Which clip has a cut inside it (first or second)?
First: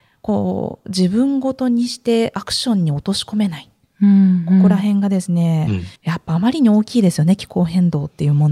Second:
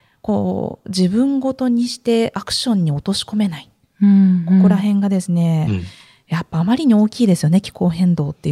first